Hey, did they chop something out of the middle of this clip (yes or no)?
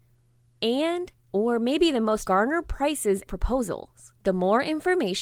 yes